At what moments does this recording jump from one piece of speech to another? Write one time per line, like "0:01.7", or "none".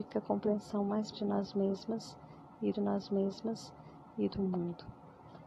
0:01.1
0:02.7